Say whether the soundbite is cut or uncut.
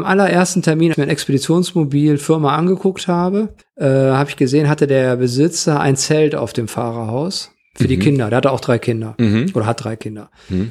cut